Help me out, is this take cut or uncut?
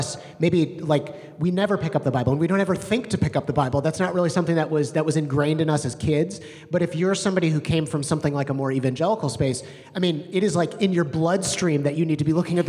uncut